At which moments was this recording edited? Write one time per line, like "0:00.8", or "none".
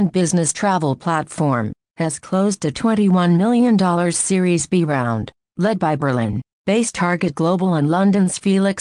none